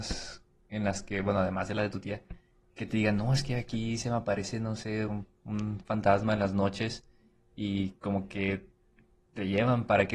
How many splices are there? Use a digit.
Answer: 0